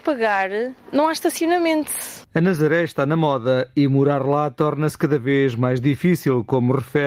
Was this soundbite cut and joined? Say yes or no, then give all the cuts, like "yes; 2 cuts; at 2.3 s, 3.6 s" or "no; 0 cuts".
no; 0 cuts